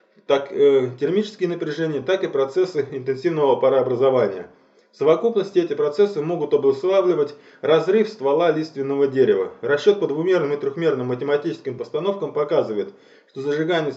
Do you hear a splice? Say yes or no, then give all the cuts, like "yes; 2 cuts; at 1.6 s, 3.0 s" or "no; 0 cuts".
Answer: no; 0 cuts